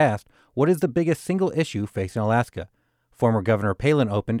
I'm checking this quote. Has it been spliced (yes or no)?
no